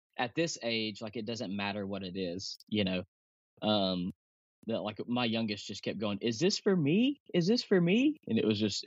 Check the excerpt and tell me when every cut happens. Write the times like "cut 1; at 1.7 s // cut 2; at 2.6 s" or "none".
none